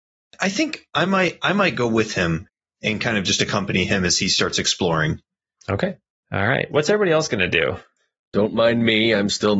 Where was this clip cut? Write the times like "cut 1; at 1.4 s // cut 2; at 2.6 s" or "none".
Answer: none